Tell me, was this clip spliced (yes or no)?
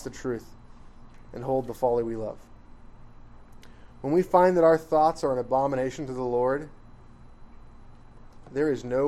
no